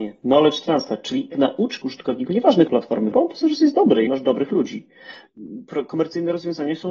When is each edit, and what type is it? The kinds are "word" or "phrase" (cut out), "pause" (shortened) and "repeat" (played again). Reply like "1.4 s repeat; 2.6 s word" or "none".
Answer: 1.3 s word; 1.8 s word; 2.7 s word; 3.1 s word; 4.1 s word